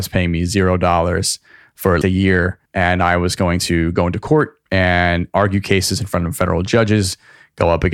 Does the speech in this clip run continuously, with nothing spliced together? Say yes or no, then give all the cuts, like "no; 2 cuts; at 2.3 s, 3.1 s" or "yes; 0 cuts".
no; 3 cuts; at 2.0 s, 2.7 s, 4.7 s